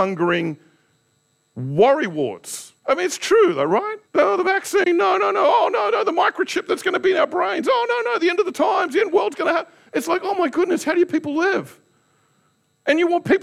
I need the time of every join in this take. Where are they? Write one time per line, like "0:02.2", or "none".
0:02.8
0:04.0